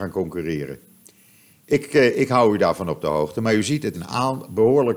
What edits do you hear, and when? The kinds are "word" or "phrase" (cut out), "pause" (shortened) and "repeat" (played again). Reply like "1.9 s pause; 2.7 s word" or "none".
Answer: 3.9 s word

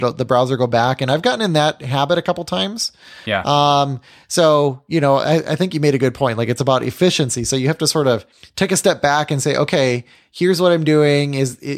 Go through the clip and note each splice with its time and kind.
none

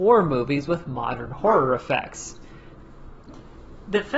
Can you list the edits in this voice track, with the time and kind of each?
none

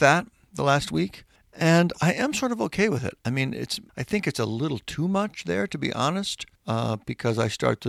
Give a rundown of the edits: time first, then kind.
1.4 s pause; 3.9 s pause; 6.6 s pause

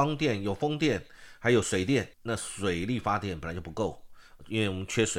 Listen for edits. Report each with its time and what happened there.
2.1 s pause

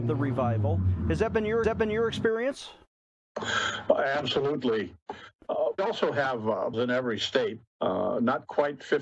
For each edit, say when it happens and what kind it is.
1.6 s repeat; 5.8 s phrase; 6.7 s phrase; 7.7 s pause

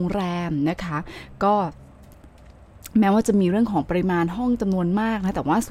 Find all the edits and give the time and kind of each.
none

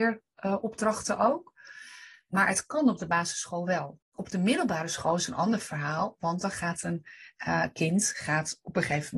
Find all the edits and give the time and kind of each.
4.0 s pause

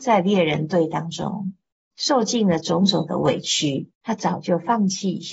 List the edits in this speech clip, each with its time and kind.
1.7 s pause; 3.9 s pause

